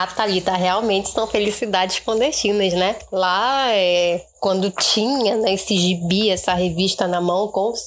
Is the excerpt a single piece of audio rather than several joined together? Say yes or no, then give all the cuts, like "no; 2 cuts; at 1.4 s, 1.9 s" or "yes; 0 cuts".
yes; 0 cuts